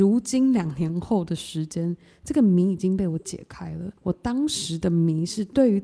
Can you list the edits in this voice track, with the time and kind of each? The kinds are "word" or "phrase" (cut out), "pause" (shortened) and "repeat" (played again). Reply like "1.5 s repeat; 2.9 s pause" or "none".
4.0 s pause